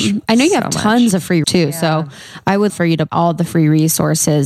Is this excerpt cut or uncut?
cut